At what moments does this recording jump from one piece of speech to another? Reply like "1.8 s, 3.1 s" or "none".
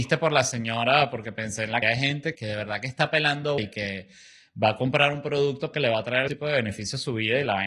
1.8 s, 2.3 s, 3.6 s, 5.7 s, 6.3 s